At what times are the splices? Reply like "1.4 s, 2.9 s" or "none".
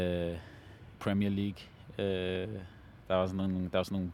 1.0 s